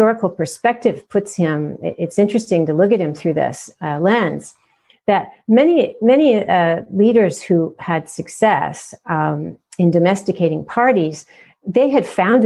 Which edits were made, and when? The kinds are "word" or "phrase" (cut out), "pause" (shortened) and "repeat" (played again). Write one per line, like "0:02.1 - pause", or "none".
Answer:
none